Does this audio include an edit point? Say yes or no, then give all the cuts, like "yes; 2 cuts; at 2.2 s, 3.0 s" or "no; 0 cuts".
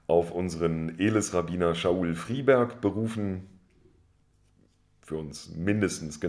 no; 0 cuts